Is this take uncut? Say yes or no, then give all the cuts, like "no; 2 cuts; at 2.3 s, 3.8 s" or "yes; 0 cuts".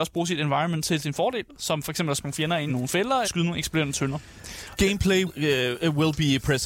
no; 4 cuts; at 2.2 s, 2.7 s, 3.2 s, 5.3 s